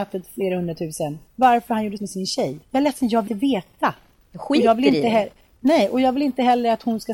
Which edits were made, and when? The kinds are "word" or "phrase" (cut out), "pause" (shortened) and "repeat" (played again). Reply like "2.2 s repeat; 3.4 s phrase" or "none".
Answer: 1.3 s pause; 2.0 s word; 2.6 s pause; 3.3 s word

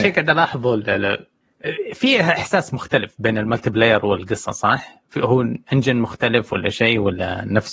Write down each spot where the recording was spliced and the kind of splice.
5.6 s pause

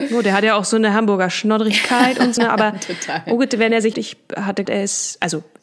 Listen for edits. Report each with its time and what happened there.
2.4 s word; 3.9 s phrase; 4.7 s word

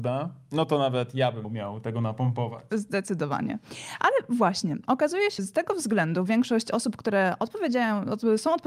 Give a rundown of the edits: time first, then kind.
1.4 s word; 5.4 s word

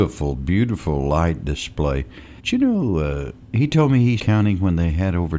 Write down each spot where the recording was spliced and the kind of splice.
2.4 s pause; 3.4 s pause; 4.2 s word

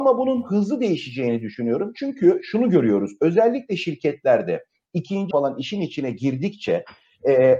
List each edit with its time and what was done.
5.3 s word

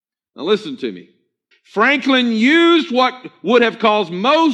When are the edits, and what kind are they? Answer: 1.5 s pause

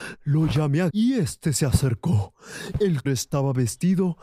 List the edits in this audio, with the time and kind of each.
0.9 s word; 3.1 s word

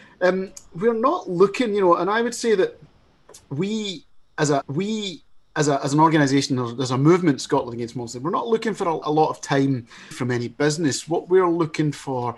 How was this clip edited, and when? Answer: 4.6 s repeat; 9.0 s word; 10.1 s phrase

